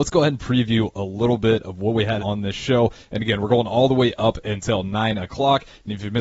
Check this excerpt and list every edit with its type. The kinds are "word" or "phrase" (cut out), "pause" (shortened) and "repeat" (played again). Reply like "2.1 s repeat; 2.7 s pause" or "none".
2.2 s word

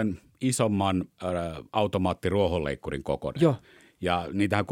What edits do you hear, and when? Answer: none

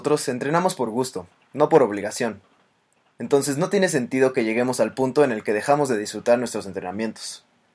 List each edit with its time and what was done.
none

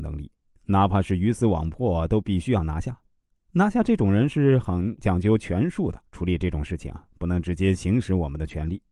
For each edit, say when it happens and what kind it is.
3.3 s pause; 6.1 s pause

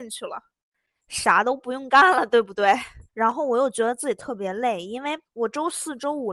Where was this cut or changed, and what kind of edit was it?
3.1 s pause; 5.3 s pause

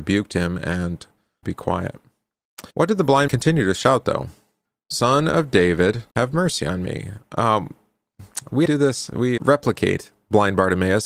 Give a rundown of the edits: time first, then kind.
1.4 s phrase; 2.7 s pause; 3.3 s word; 4.6 s pause; 6.1 s pause; 8.7 s word; 9.4 s word

